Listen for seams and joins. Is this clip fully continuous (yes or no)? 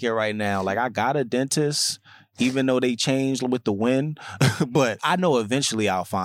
no